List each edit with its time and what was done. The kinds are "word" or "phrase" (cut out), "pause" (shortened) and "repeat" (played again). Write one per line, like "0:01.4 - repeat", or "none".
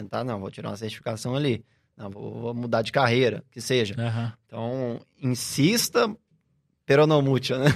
none